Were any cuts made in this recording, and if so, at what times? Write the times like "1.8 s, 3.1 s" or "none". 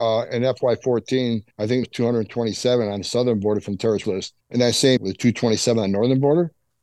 1.5 s, 1.8 s, 4.0 s, 4.4 s, 5.0 s